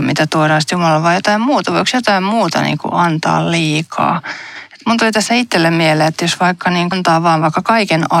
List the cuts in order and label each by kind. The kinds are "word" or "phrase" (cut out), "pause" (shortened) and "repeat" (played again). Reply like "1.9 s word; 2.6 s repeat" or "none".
6.9 s phrase

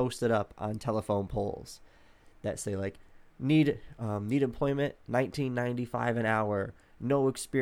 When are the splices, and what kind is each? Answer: 3.3 s pause

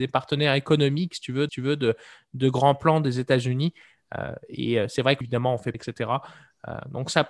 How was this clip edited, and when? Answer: 1.5 s repeat; 5.2 s phrase; 5.7 s phrase

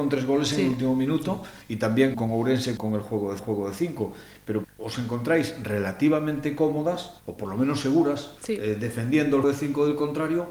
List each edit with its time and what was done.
1.6 s pause; 2.1 s word; 2.8 s word; 3.4 s repeat; 4.6 s phrase; 7.2 s pause; 8.4 s pause; 9.4 s word

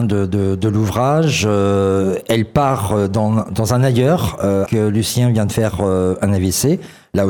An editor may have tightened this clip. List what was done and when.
4.7 s word

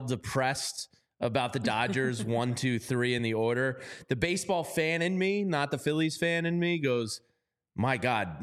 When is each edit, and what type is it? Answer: none

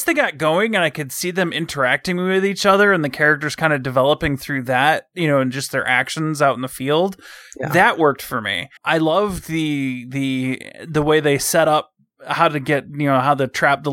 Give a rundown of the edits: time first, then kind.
8.8 s word

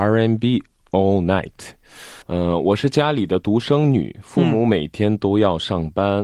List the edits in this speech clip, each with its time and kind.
2.2 s pause

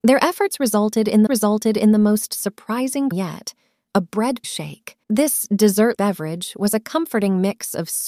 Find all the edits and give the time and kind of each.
1.3 s repeat; 3.1 s word; 4.4 s word; 5.0 s pause; 6.0 s word

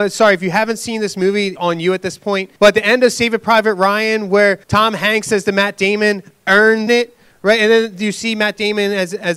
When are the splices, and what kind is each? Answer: 1.6 s word; 2.6 s pause; 4.6 s pause; 6.9 s phrase

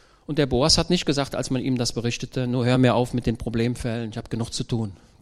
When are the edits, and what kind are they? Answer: none

